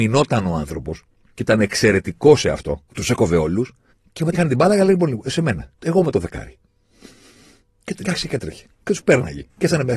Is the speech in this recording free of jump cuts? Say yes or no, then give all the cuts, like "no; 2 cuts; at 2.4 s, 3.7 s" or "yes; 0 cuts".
no; 7 cuts; at 1.4 s, 2.9 s, 3.9 s, 4.3 s, 5.8 s, 8.0 s, 8.7 s